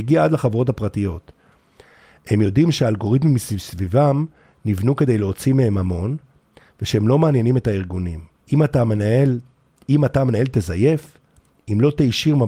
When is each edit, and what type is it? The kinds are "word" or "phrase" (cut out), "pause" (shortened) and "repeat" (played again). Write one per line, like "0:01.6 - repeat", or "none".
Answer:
0:08.4 - pause